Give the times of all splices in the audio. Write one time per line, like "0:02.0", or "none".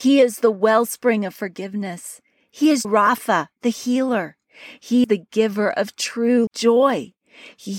0:02.8
0:05.0
0:06.5